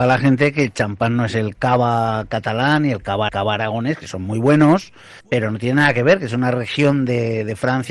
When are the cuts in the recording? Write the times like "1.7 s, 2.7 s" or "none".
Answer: 3.3 s, 5.2 s